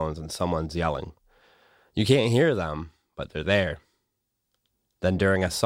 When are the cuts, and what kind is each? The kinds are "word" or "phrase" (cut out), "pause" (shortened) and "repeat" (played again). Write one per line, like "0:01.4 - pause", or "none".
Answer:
none